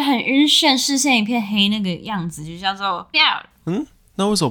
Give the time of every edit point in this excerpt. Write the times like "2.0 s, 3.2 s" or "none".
3.1 s